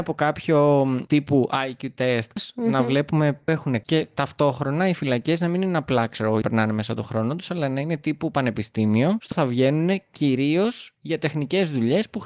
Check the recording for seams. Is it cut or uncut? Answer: cut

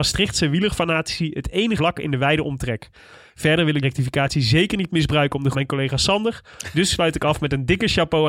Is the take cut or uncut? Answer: cut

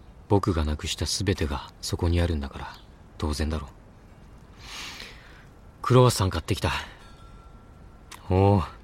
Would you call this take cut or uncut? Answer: cut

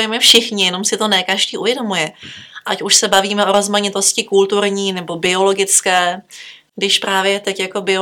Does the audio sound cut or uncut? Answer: uncut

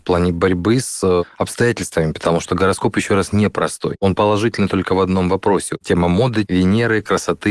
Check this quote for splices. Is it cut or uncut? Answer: cut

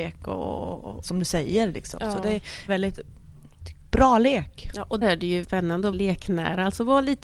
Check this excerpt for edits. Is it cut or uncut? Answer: cut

